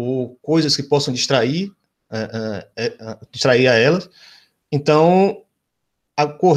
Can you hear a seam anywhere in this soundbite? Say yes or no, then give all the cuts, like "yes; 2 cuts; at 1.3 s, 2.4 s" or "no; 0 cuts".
no; 0 cuts